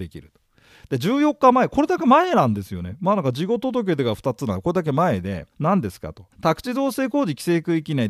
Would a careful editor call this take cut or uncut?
cut